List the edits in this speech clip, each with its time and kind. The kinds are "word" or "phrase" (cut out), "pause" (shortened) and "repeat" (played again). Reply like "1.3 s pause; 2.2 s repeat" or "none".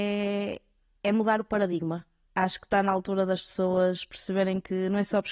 none